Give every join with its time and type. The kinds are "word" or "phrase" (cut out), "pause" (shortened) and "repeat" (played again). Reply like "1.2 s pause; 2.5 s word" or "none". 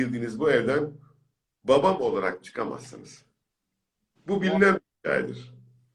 none